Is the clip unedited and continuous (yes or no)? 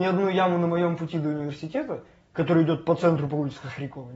yes